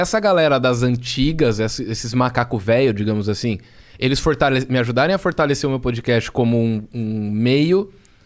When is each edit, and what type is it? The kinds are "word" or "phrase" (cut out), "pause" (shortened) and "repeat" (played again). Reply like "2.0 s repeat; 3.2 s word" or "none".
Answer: none